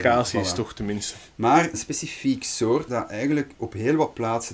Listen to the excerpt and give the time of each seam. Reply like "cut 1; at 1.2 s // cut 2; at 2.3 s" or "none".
cut 1; at 1.7 s // cut 2; at 2.9 s